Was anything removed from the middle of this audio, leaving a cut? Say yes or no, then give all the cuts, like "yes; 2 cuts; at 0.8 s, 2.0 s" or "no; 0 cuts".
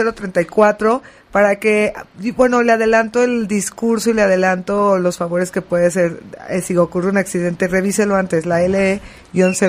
no; 0 cuts